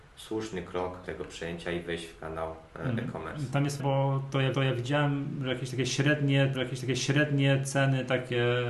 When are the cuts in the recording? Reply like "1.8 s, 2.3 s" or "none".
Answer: 1.0 s, 3.8 s, 4.5 s, 6.5 s